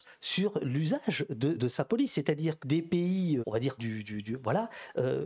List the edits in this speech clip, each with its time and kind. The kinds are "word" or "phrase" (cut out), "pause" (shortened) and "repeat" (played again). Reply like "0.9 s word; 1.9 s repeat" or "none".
1.6 s word; 2.6 s word; 3.4 s word; 3.8 s word

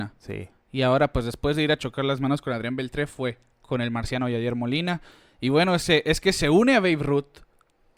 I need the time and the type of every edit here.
none

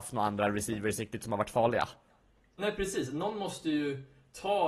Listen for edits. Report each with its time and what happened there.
none

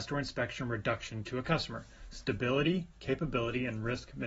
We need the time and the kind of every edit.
none

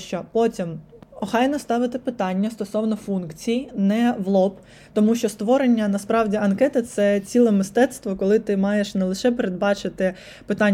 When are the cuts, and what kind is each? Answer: none

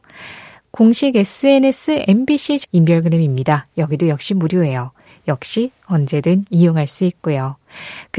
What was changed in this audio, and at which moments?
2.6 s phrase

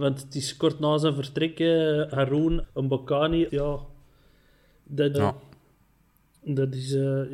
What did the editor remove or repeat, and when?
2.6 s word; 3.5 s word; 5.1 s word

